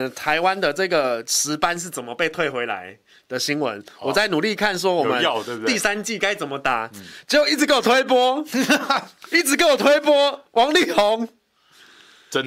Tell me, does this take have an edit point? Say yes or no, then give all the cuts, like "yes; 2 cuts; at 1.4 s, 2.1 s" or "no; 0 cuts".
no; 0 cuts